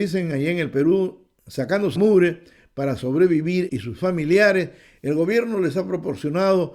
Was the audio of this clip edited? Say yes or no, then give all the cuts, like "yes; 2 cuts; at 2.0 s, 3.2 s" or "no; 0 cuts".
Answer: yes; 2 cuts; at 2.0 s, 3.7 s